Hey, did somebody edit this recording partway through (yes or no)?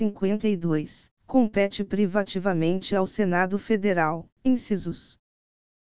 yes